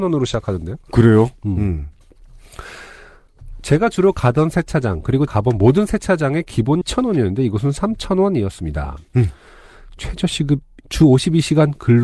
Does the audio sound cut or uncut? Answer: cut